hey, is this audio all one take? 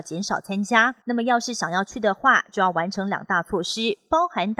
no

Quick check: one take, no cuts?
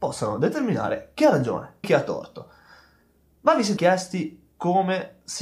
no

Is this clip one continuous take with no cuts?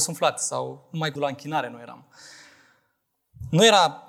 no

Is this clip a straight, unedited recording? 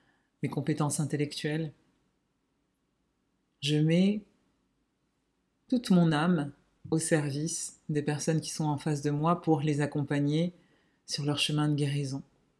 yes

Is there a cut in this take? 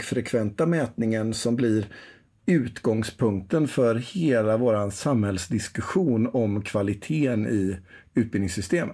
no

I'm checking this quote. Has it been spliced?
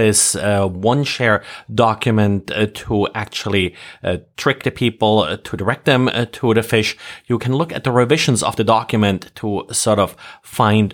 no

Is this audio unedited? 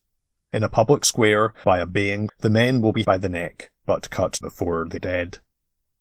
no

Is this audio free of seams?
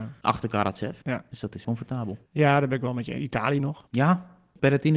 no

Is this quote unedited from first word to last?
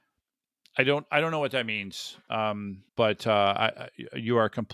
no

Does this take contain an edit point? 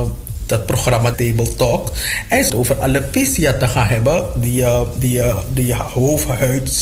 yes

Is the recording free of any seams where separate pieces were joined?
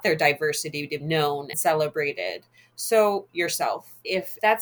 no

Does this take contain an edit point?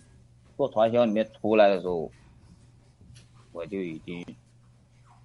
no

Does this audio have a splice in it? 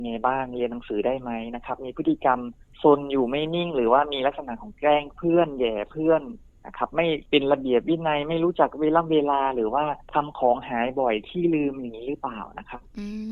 yes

